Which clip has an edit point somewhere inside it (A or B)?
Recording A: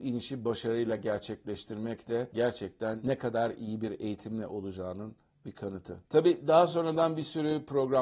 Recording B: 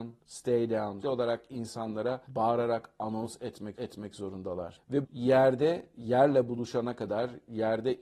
B